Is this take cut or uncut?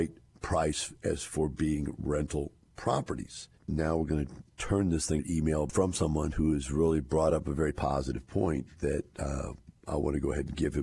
cut